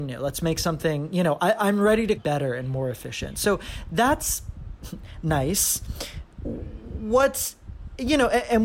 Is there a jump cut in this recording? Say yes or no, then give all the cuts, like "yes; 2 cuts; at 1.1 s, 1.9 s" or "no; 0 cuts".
yes; 2 cuts; at 2.2 s, 6.3 s